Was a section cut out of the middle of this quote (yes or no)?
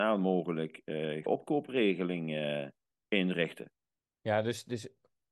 yes